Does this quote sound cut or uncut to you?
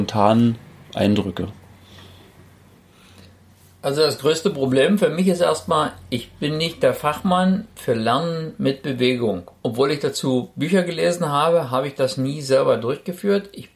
uncut